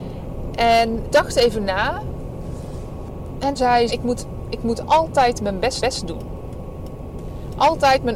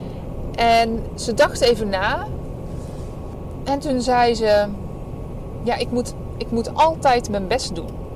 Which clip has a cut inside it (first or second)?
first